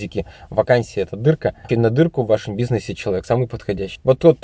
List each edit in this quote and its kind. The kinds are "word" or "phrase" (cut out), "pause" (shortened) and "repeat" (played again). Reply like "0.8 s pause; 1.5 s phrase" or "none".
1.7 s word